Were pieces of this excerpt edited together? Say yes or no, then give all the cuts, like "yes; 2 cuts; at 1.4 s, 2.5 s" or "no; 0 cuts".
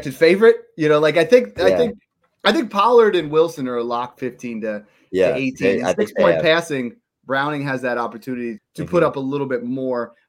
yes; 2 cuts; at 4.2 s, 8.6 s